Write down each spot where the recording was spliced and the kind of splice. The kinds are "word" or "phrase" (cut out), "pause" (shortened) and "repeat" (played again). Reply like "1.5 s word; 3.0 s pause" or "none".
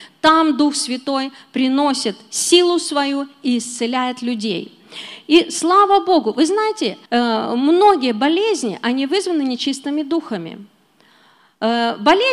7.1 s pause